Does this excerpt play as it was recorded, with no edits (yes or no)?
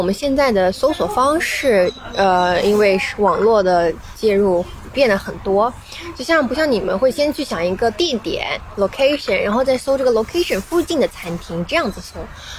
yes